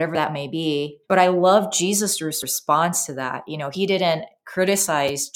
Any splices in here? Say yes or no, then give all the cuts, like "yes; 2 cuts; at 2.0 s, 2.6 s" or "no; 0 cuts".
yes; 1 cut; at 1.0 s